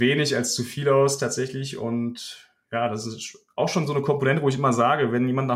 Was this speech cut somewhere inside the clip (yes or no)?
no